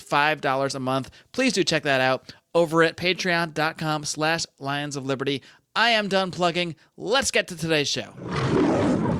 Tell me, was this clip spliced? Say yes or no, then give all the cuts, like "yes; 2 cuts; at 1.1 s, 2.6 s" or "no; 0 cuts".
no; 0 cuts